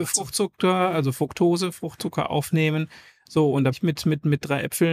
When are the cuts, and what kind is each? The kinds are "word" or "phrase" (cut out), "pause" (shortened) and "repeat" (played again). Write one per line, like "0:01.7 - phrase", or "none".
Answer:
0:03.7 - word